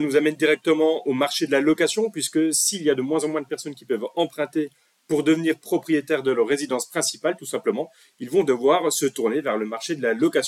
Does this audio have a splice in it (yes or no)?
no